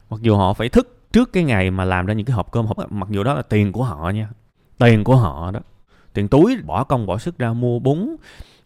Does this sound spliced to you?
yes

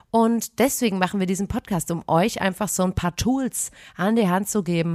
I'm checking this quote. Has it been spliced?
no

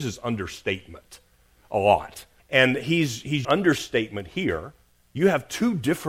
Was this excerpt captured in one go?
no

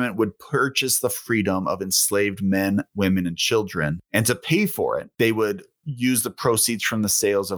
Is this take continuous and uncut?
yes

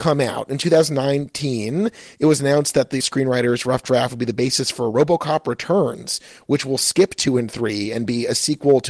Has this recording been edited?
yes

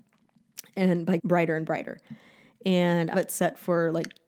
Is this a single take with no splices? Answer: no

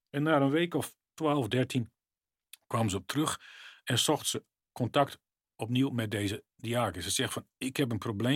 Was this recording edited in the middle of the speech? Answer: no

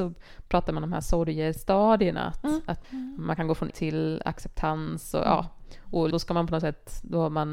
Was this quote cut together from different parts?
yes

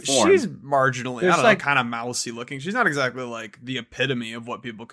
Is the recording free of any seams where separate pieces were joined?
yes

